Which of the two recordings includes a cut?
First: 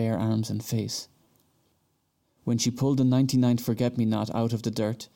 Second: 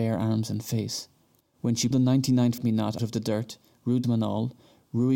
second; 5 cuts; at 1.4 s, 1.9 s, 2.6 s, 3.0 s, 4.0 s

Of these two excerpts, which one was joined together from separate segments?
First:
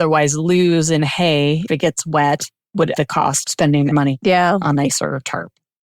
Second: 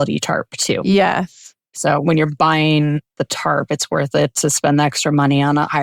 first; 5 cuts; at 1.7 s, 3.0 s, 3.4 s, 3.9 s, 4.7 s

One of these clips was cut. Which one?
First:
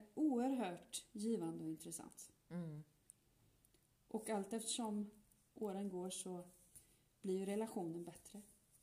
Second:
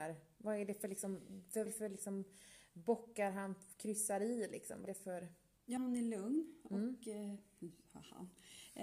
second; 3 cuts; at 1.7 s, 4.8 s, 5.8 s

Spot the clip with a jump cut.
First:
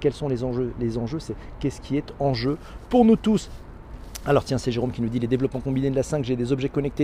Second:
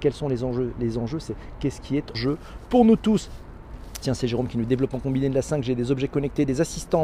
second; 3 cuts; at 2.1 s, 4.0 s, 4.7 s

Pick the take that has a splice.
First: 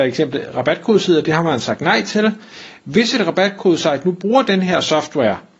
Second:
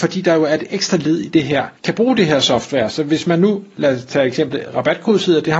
second; 1 cut; at 1.8 s

